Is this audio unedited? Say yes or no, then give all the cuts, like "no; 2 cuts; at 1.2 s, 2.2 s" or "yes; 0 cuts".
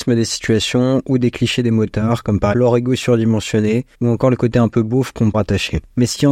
no; 3 cuts; at 2.5 s, 3.9 s, 5.3 s